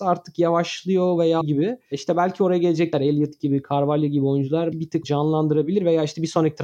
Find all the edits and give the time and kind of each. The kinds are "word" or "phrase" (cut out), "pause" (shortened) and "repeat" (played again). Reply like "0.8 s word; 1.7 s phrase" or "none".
1.4 s word; 2.9 s word; 4.7 s word; 5.0 s word